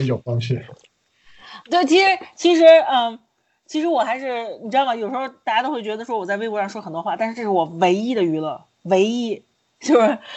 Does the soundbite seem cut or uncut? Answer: uncut